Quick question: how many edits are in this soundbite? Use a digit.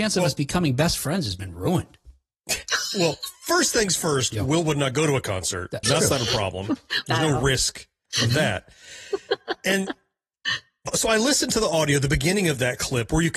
2